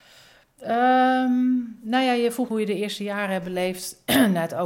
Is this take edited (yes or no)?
yes